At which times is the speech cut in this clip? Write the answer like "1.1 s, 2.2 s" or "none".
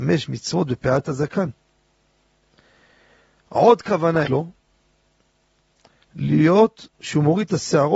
4.2 s, 6.9 s